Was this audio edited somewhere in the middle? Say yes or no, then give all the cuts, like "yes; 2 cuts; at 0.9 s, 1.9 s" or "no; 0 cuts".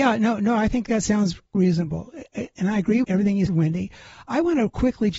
yes; 3 cuts; at 1.5 s, 3.0 s, 3.5 s